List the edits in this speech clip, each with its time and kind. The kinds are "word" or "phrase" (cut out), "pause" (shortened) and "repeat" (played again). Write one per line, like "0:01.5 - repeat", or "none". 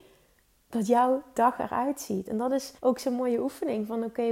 0:02.8 - pause